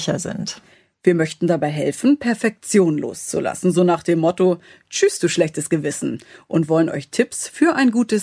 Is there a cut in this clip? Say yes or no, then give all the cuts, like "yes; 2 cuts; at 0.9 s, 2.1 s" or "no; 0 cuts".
no; 0 cuts